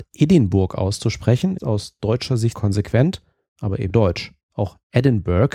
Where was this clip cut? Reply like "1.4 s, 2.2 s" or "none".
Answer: 1.6 s, 2.6 s, 3.9 s, 4.4 s